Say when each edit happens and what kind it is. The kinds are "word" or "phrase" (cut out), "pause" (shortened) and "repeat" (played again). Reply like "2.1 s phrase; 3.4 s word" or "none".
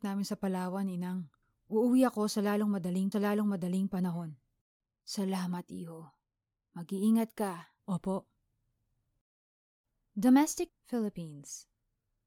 1.4 s pause; 3.1 s repeat; 7.8 s pause; 10.7 s word

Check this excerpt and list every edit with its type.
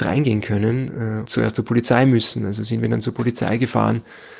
1.3 s word

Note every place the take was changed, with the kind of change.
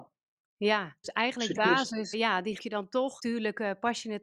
1.0 s word; 1.6 s word; 2.1 s word; 2.6 s word; 3.2 s word

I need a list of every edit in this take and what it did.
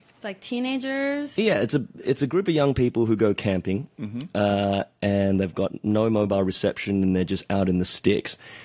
none

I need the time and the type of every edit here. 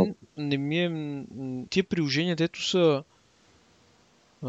1.7 s word

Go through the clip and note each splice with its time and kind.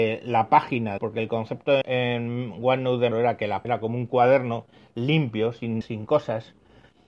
1.0 s word; 1.8 s word; 3.1 s word; 3.6 s word; 5.8 s word

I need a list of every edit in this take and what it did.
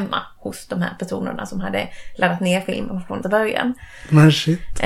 3.2 s word

